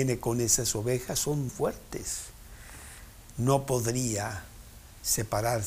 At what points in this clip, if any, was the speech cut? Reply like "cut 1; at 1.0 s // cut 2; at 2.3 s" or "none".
cut 1; at 1.5 s